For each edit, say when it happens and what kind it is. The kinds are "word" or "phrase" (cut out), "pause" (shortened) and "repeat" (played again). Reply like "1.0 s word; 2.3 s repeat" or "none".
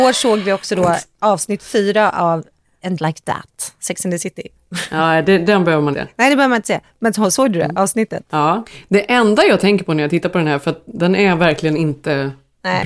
3.0 s word; 5.9 s word

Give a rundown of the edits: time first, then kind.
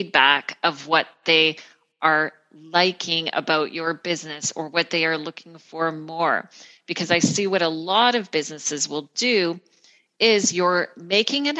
none

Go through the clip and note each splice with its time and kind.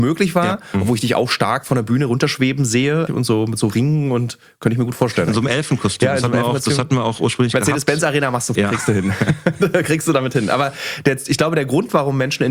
3.1 s word; 8.5 s word

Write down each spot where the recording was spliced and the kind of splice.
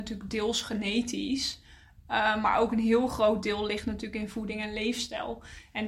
none

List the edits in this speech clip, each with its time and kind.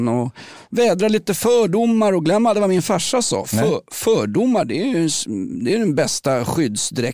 none

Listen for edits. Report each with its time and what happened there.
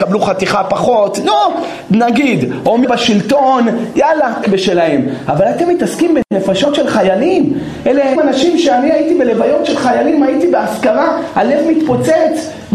2.8 s word; 4.4 s phrase; 8.2 s word

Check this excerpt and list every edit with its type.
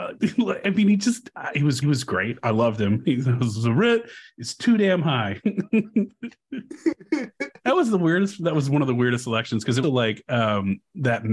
1.8 s repeat; 9.8 s phrase

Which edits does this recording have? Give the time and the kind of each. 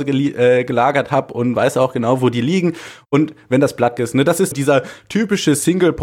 4.0 s word; 4.5 s word

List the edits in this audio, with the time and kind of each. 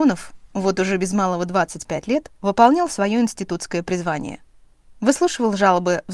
2.4 s pause

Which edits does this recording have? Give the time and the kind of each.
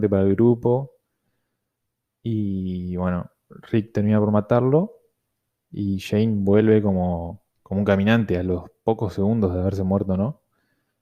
7.5 s pause

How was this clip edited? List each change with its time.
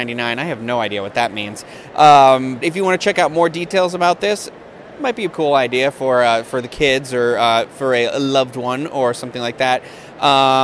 2.6 s word; 5.3 s word

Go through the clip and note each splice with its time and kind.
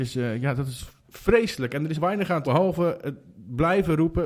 1.0 s pause; 2.0 s phrase; 2.4 s word

